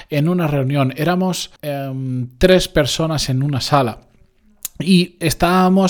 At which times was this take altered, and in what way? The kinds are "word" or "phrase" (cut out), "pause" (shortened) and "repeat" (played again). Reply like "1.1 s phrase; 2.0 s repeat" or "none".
1.6 s pause